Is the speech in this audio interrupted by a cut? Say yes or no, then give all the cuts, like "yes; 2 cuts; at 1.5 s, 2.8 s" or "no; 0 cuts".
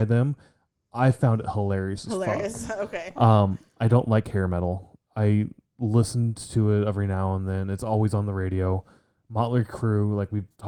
no; 0 cuts